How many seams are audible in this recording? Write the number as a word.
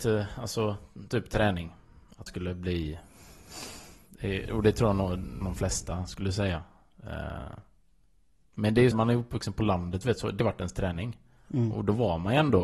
four